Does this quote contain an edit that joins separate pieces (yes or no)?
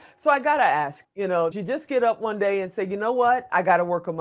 yes